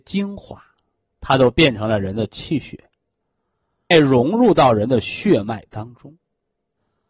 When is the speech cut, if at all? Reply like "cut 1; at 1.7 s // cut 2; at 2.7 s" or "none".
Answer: cut 1; at 3.9 s